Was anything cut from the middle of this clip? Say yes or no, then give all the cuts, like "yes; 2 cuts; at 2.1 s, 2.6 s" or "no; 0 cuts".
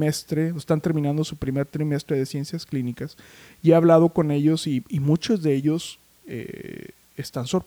no; 0 cuts